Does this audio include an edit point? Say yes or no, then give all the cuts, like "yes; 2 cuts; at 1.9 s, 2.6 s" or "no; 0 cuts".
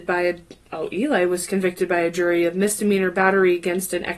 no; 0 cuts